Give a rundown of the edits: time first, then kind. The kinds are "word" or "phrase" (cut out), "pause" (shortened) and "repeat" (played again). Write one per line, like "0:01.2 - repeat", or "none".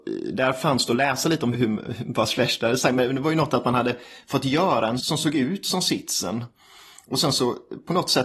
0:01.5 - word
0:05.0 - word